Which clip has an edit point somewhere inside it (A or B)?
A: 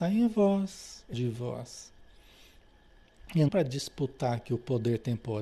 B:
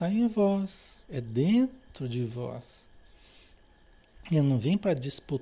A